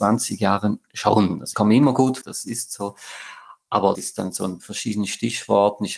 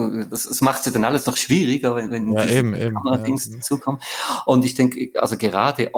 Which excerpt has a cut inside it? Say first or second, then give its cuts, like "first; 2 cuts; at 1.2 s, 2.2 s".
first; 4 cuts; at 1.5 s, 2.2 s, 3.9 s, 4.6 s